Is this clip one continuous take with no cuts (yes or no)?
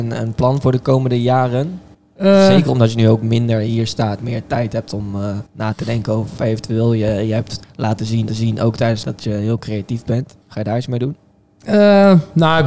no